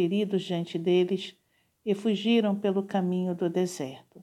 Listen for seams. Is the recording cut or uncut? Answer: uncut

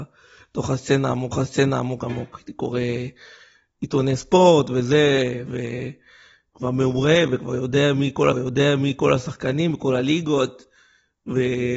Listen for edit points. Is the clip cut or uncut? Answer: cut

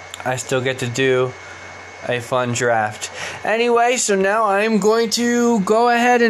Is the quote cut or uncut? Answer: uncut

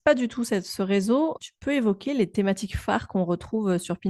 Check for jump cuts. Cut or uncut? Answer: cut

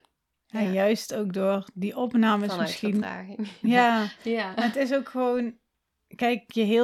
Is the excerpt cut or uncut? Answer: uncut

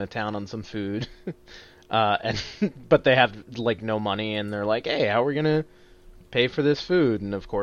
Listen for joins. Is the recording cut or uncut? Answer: uncut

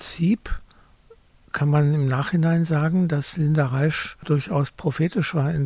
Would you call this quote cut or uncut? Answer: uncut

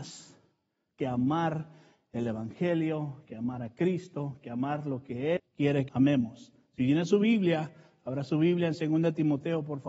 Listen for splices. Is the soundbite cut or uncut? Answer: cut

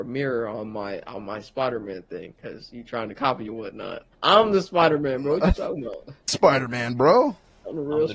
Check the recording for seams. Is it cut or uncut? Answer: cut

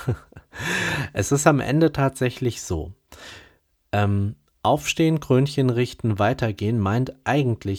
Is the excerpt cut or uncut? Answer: uncut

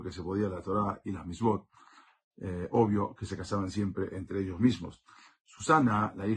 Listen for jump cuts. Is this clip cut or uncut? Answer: uncut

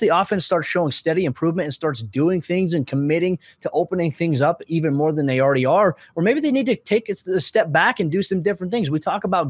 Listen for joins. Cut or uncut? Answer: uncut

